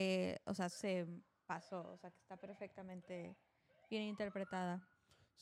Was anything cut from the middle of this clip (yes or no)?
no